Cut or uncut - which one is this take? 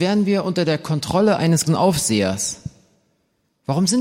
cut